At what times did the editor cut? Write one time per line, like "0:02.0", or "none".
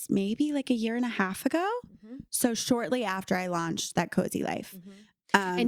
none